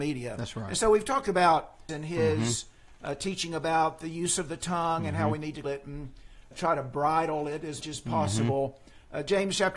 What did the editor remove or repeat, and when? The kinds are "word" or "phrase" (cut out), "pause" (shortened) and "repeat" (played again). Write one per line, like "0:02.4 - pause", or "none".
0:01.9 - word
0:05.6 - word
0:06.5 - word
0:07.8 - word